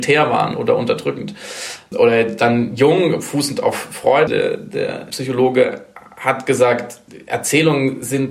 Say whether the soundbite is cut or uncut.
cut